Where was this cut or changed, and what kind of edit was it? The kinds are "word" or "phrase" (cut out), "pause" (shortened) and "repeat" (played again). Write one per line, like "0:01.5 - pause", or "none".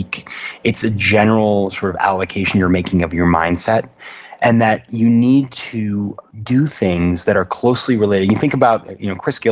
0:06.3 - pause